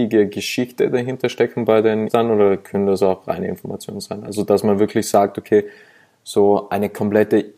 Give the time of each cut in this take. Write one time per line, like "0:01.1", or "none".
0:02.1